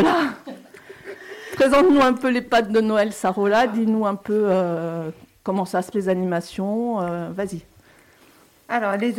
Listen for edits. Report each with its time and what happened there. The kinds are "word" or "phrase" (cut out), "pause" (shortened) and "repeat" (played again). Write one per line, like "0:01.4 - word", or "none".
0:05.9 - word